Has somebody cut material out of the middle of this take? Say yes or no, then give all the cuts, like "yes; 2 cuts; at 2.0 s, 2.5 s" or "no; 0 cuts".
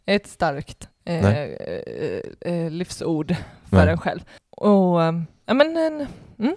no; 0 cuts